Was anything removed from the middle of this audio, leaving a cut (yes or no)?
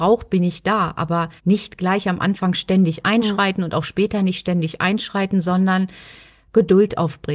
yes